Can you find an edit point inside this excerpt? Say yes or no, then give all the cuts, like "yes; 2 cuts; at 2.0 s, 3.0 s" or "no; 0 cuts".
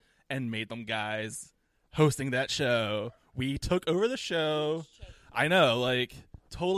no; 0 cuts